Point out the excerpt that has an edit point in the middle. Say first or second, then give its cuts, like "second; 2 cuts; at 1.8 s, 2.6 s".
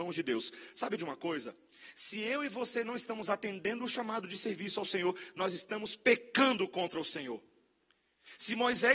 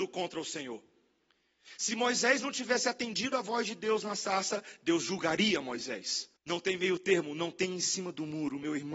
second; 1 cut; at 6.4 s